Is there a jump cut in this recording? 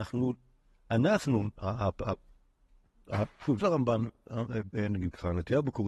yes; 1 cut; at 3.6 s

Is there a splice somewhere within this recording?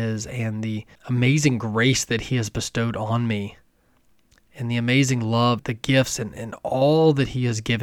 yes; 3 cuts; at 1.0 s, 4.0 s, 5.6 s

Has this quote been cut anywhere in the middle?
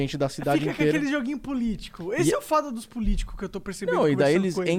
no; 0 cuts

